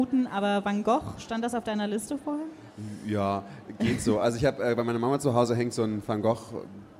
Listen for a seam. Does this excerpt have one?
no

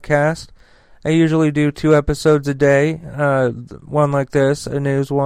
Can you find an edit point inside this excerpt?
no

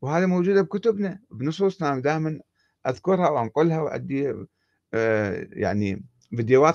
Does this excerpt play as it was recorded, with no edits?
yes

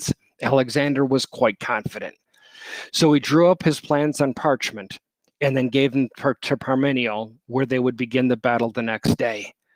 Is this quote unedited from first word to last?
yes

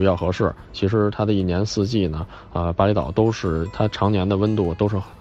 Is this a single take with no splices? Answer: yes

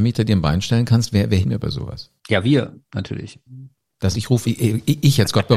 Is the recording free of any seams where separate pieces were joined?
no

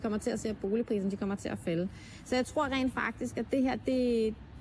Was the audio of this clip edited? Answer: no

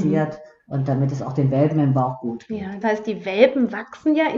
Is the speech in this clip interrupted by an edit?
yes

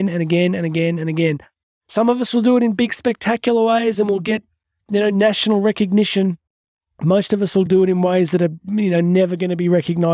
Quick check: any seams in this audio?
no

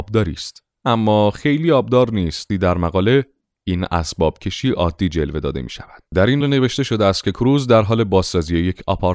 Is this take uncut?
no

